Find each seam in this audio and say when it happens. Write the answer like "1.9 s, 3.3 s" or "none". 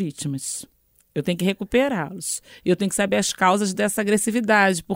none

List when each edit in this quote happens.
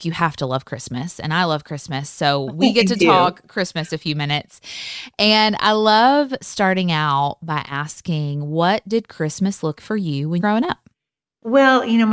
9.8 s, 10.4 s, 10.9 s

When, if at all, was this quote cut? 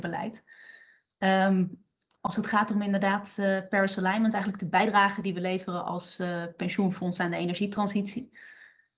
none

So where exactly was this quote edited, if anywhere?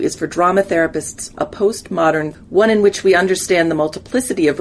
1.3 s, 2.3 s

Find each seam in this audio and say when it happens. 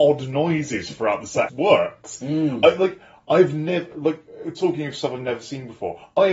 1.5 s

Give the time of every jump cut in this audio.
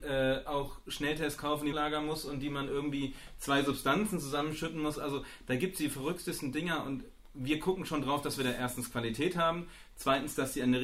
1.7 s

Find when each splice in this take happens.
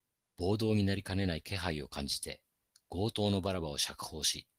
none

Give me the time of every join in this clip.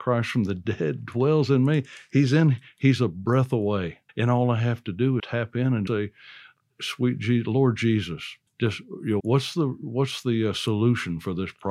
4.1 s, 5.2 s, 5.9 s, 8.5 s, 9.2 s

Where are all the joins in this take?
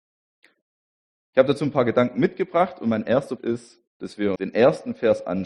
3.4 s, 3.9 s, 4.4 s

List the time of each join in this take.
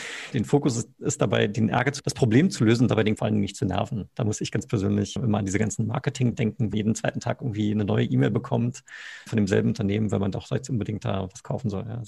2.0 s, 3.2 s, 5.2 s, 6.3 s, 6.7 s, 9.3 s

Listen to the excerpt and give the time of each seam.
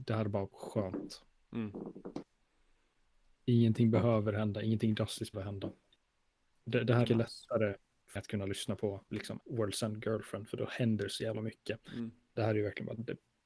5.3 s, 7.0 s, 8.2 s, 9.4 s, 12.4 s

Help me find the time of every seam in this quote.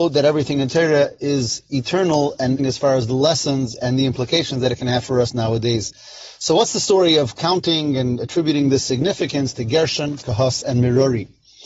2.6 s

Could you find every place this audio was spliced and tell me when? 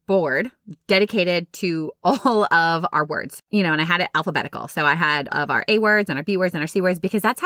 2.9 s, 3.5 s, 5.3 s

